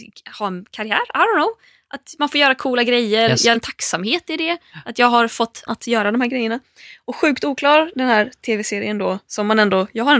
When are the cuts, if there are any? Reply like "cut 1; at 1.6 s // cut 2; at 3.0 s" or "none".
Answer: cut 1; at 3.5 s // cut 2; at 5.7 s